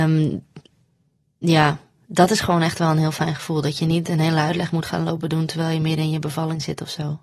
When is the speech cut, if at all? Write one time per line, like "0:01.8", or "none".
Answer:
none

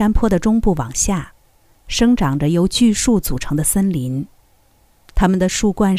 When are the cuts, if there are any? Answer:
none

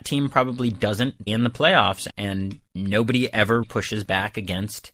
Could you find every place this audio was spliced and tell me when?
0:01.3
0:02.1
0:02.7
0:03.6

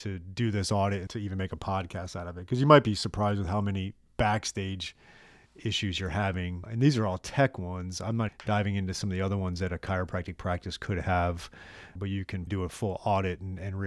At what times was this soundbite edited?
0:01.1
0:06.6
0:08.3
0:12.0
0:12.5

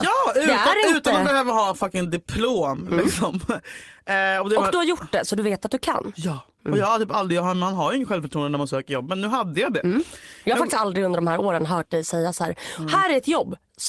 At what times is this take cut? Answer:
none

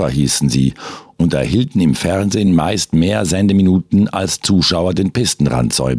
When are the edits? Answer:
none

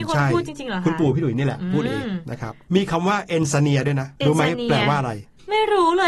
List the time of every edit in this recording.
0:04.2

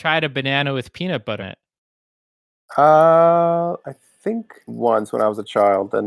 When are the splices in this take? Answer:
0:01.4
0:04.7

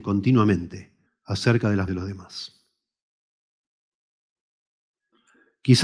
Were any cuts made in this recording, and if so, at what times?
0:01.1
0:01.9

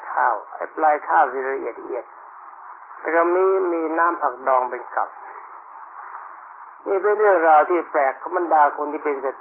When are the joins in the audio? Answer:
0:06.8

